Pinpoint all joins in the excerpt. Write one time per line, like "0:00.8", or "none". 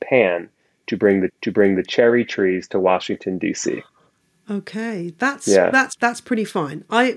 0:01.3
0:04.2
0:06.0